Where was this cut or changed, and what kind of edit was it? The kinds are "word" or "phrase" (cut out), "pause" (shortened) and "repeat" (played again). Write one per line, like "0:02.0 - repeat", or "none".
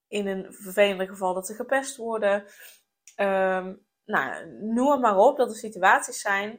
none